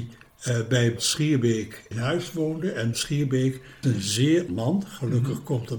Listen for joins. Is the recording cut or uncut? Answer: cut